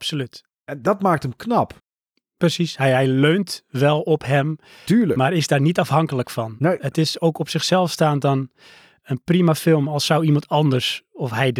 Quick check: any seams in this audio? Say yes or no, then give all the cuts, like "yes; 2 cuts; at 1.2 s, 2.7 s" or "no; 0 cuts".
no; 0 cuts